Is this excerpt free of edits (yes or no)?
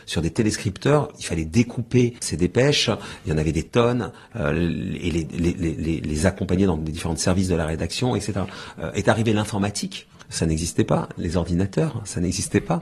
yes